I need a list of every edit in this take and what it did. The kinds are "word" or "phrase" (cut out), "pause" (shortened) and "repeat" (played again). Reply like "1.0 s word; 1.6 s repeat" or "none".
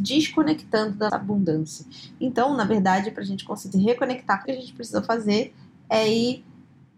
1.1 s word; 3.7 s word; 4.4 s phrase

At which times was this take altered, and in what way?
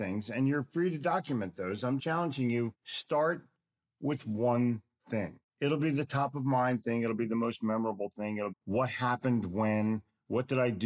2.0 s word; 8.5 s word

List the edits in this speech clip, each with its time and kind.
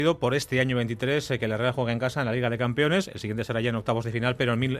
none

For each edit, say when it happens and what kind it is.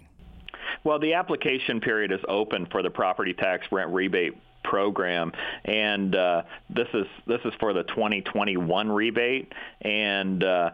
none

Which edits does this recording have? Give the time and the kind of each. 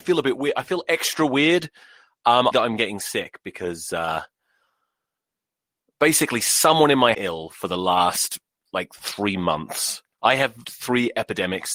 2.5 s phrase; 7.1 s phrase; 10.1 s pause; 10.6 s word

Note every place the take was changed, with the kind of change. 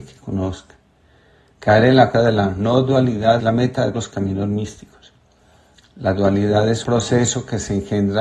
2.1 s word; 3.4 s word; 3.9 s word; 6.8 s word

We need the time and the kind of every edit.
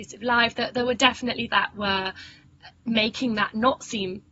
1.5 s word

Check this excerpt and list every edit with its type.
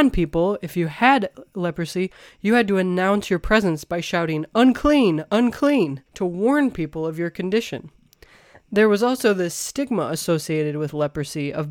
6.1 s pause

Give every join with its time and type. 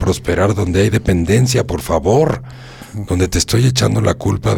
none

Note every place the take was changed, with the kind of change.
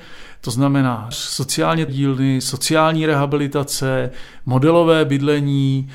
1.1 s phrase; 1.9 s word

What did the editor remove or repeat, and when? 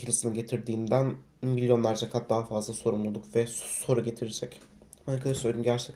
none

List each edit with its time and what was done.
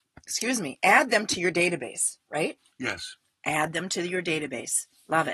none

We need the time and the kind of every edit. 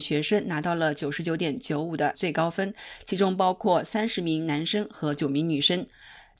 2.1 s word

